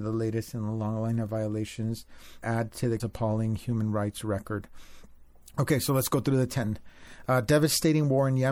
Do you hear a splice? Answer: yes; 2 cuts; at 2.4 s, 3.0 s

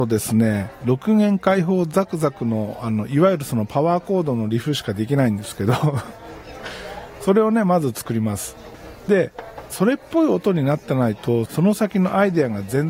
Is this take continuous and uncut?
no; 1 cut; at 9.7 s

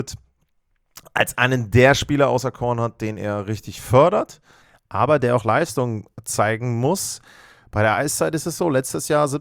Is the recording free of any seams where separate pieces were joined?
yes; 0 cuts

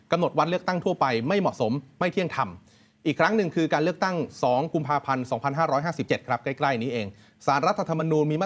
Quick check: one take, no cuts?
yes; 0 cuts

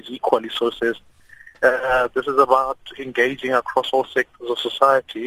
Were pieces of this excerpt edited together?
no; 0 cuts

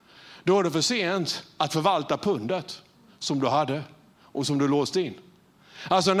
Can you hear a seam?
no; 0 cuts

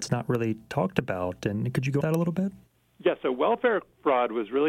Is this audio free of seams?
no; 2 cuts; at 2.0 s, 2.7 s

